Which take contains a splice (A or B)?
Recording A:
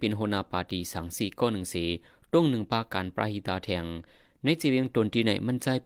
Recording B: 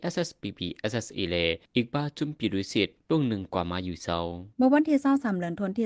B